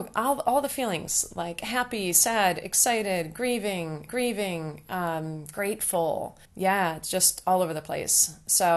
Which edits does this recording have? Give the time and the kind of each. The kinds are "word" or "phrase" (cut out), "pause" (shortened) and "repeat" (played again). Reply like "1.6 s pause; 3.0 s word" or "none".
4.1 s repeat; 6.4 s pause